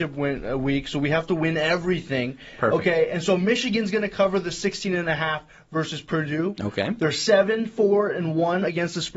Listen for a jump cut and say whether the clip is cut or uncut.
uncut